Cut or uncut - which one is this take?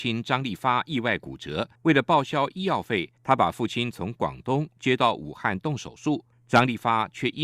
cut